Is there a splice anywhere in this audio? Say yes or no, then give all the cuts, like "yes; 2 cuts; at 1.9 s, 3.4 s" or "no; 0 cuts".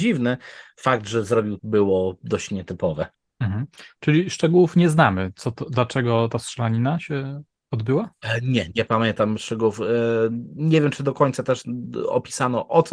yes; 2 cuts; at 1.6 s, 3.1 s